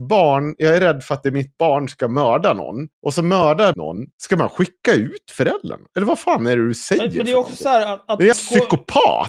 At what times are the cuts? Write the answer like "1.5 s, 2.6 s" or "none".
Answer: 2.9 s, 3.7 s, 4.1 s, 8.3 s